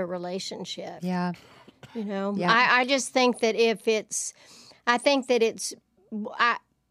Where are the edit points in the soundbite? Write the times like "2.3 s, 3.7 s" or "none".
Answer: none